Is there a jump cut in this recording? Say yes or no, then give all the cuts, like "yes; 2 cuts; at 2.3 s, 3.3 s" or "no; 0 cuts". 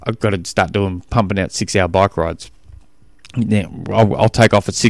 no; 0 cuts